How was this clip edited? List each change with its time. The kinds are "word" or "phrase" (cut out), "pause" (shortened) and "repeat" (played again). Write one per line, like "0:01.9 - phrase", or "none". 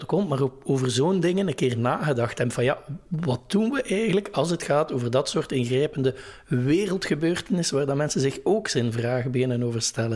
none